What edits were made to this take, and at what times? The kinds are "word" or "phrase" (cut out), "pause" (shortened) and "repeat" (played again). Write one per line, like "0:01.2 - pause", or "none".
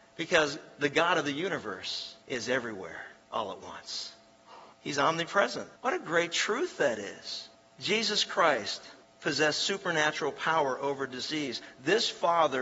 0:02.2 - pause
0:03.2 - pause
0:04.7 - pause
0:05.8 - pause
0:07.5 - pause
0:09.0 - pause